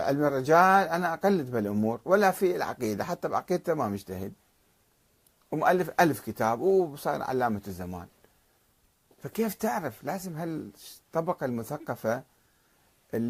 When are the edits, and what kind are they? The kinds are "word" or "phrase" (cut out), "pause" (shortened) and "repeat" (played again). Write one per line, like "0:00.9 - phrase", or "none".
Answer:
none